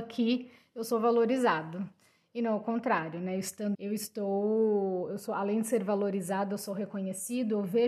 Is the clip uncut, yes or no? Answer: no